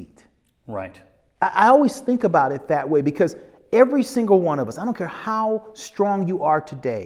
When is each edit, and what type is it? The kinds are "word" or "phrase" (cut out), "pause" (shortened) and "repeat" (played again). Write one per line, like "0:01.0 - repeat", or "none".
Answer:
none